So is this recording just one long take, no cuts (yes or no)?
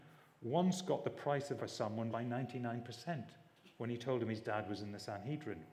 no